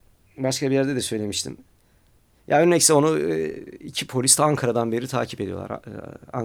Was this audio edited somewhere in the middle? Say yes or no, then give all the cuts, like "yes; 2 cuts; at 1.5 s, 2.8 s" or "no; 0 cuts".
yes; 1 cut; at 2.2 s